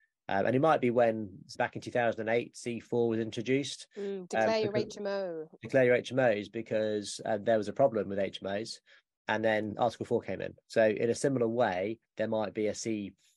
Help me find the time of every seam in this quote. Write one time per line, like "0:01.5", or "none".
0:01.5
0:10.6
0:12.1